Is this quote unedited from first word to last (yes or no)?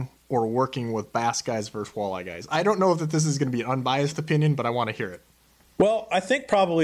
yes